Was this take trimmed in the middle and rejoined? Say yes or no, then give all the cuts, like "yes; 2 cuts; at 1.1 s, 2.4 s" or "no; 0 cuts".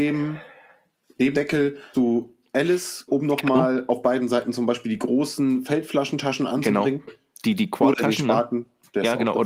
yes; 3 cuts; at 1.3 s, 1.9 s, 3.1 s